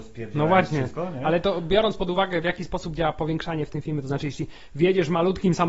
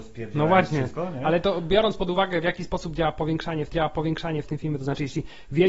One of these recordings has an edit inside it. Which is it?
second; 1 cut; at 3.7 s

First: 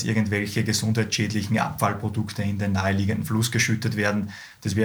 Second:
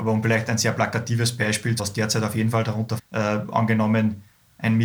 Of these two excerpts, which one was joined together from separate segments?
second; 2 cuts; at 1.8 s, 3.0 s

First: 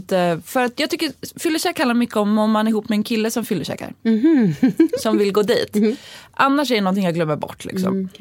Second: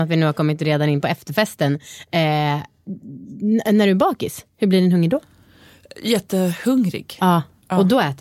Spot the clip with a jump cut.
first; 1 cut; at 4.0 s

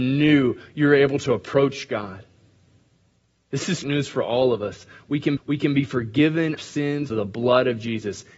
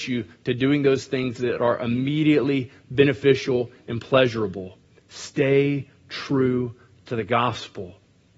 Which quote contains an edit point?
first; 4 cuts; at 3.8 s, 5.4 s, 6.6 s, 7.1 s

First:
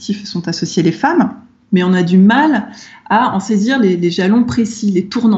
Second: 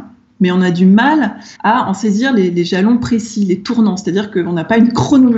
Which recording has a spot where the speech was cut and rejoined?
second; 1 cut; at 1.5 s

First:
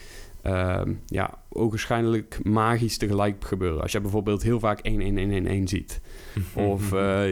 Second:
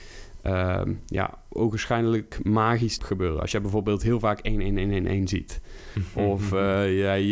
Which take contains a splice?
second; 1 cut; at 3.0 s

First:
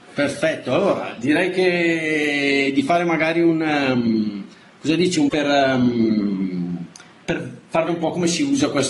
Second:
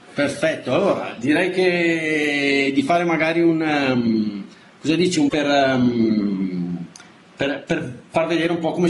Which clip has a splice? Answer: first; 2 cuts; at 7.2 s, 7.9 s

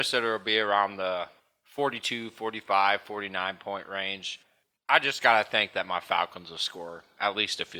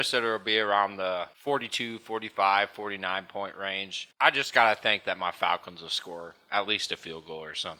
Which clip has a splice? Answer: second; 2 cuts; at 1.3 s, 4.1 s

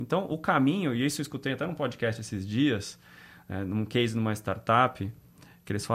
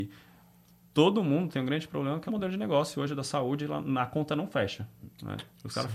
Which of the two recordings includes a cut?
second; 1 cut; at 2.3 s

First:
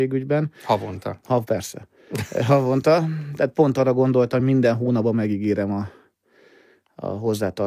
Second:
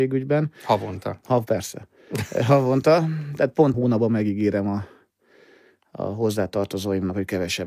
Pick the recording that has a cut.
second; 1 cut; at 3.7 s

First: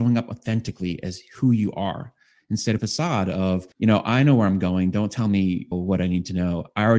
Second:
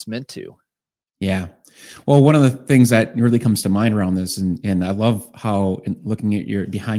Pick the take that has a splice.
first; 3 cuts; at 2.8 s, 3.7 s, 5.7 s

